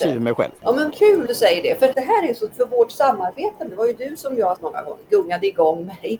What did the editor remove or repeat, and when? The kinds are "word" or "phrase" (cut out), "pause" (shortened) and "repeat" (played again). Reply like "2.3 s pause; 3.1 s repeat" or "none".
0.9 s word; 1.3 s word; 1.9 s word; 2.5 s word; 3.7 s word; 4.6 s word